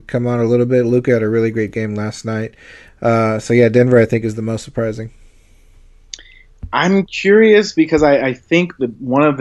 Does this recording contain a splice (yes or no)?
no